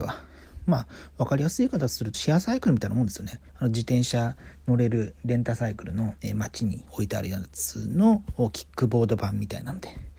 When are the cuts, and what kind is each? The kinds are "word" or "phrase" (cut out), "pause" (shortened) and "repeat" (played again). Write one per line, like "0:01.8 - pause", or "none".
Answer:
0:02.1 - phrase
0:03.5 - pause
0:06.2 - pause